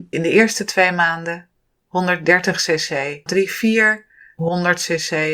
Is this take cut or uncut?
cut